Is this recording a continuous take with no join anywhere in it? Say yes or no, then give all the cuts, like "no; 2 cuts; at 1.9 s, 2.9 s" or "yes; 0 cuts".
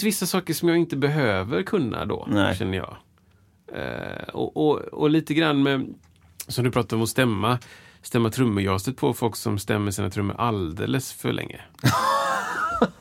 yes; 0 cuts